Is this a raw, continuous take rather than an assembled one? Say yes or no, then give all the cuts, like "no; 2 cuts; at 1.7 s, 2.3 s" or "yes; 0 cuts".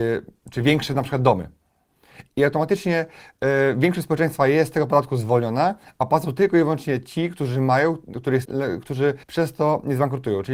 no; 2 cuts; at 8.4 s, 9.2 s